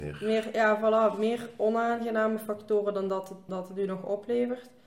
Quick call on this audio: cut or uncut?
cut